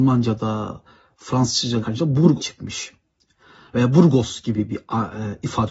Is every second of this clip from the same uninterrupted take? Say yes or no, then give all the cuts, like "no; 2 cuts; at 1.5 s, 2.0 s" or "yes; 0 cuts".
no; 2 cuts; at 1.8 s, 2.4 s